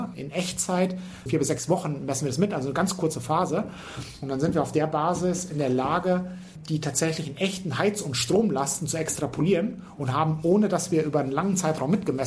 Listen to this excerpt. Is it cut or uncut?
uncut